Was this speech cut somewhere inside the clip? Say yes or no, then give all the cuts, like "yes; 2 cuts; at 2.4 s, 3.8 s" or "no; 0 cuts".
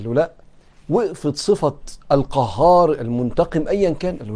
no; 0 cuts